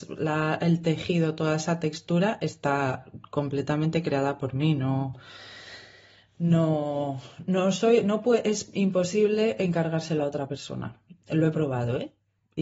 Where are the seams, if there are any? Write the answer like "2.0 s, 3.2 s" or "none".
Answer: none